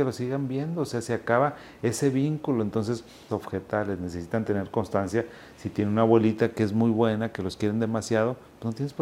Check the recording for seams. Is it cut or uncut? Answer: cut